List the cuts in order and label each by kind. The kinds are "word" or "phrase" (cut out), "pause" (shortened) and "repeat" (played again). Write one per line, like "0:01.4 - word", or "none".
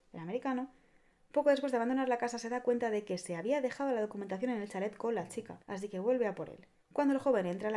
0:05.6 - pause
0:06.8 - pause